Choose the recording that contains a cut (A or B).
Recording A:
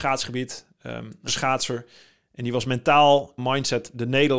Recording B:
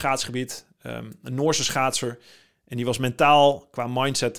A